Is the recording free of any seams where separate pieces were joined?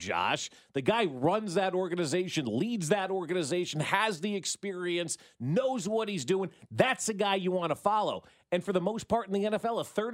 yes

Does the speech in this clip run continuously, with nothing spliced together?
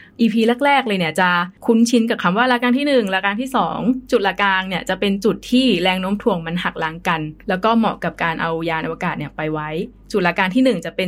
no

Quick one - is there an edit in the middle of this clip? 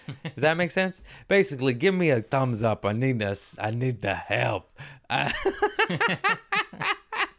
no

